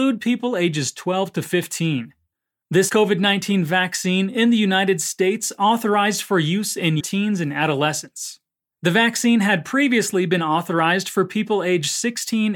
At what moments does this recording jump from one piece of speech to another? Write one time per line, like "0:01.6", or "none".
0:02.9
0:07.0